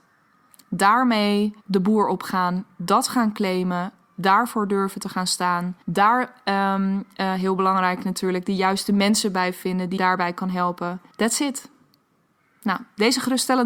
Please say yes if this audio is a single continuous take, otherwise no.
no